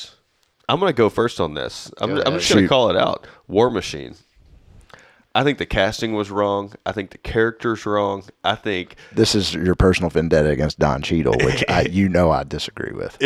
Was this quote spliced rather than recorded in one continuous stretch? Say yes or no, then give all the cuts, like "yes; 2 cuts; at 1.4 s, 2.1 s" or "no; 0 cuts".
no; 0 cuts